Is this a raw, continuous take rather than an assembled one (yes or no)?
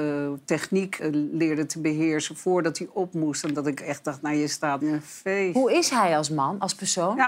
no